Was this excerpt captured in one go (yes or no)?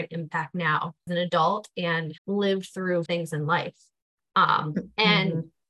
no